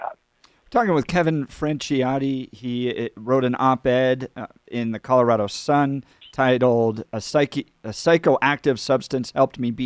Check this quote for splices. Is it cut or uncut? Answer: uncut